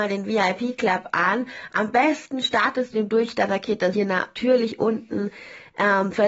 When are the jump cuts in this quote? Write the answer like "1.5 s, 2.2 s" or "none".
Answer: 2.9 s, 3.9 s